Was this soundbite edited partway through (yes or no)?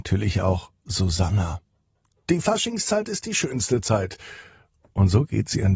no